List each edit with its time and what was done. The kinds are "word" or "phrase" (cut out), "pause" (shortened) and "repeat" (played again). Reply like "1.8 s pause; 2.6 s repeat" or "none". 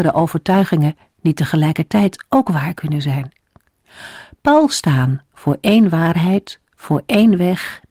none